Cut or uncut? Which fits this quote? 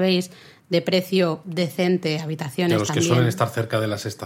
uncut